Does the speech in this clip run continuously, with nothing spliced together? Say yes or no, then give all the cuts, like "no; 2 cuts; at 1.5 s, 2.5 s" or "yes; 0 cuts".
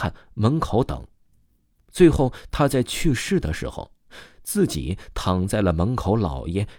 yes; 0 cuts